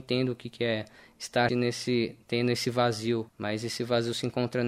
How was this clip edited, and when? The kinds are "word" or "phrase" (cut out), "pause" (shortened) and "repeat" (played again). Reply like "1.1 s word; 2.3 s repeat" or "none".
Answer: 1.5 s word; 3.3 s pause